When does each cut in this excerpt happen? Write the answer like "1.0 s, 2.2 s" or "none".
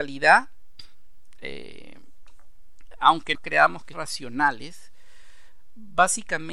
3.3 s, 3.9 s